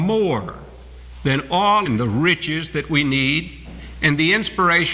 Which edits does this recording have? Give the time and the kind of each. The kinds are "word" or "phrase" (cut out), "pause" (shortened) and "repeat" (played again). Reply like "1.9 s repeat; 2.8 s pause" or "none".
1.9 s phrase

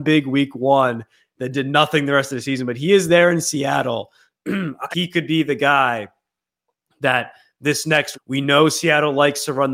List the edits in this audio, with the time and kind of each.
4.9 s word; 8.1 s word

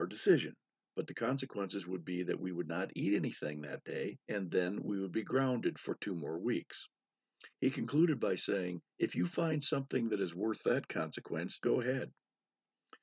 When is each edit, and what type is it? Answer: 4.2 s pause; 7.5 s pause; 8.9 s pause; 11.6 s word

